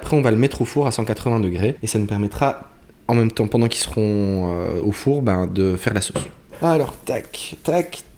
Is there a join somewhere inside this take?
no; 0 cuts

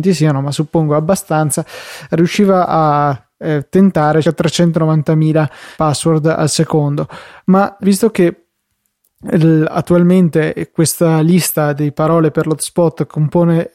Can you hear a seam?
yes; 3 cuts; at 4.2 s, 5.7 s, 7.8 s

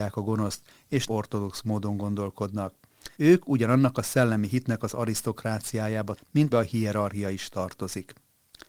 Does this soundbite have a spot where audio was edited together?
yes; 4 cuts; at 1.1 s, 3.1 s, 6.2 s, 6.5 s

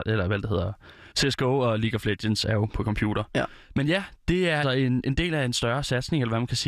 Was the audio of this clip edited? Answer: yes; 3 cuts; at 1.1 s, 3.6 s, 4.6 s

